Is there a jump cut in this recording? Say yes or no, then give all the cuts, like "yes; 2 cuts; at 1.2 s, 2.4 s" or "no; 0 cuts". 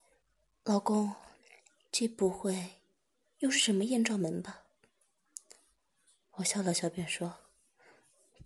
no; 0 cuts